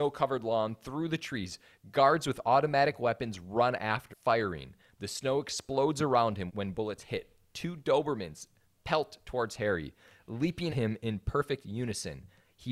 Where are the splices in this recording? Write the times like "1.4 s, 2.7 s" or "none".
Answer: 4.1 s, 6.5 s, 10.7 s